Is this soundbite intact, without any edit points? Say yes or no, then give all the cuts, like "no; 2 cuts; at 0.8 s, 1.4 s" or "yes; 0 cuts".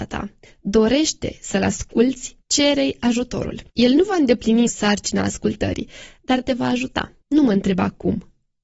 no; 4 cuts; at 2.4 s, 3.7 s, 4.7 s, 7.2 s